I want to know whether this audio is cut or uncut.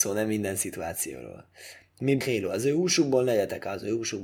cut